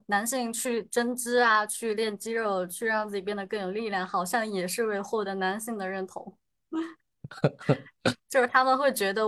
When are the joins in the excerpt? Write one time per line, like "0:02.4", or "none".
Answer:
0:07.0